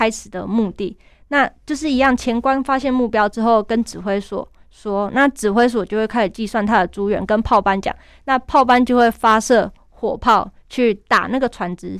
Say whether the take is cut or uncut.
uncut